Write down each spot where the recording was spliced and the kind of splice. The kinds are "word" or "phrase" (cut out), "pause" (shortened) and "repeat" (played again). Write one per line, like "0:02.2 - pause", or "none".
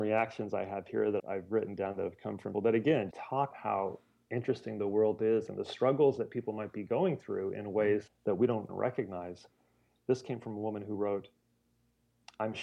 0:01.2 - word
0:02.5 - word
0:03.1 - word
0:03.5 - word
0:08.1 - word
0:08.7 - word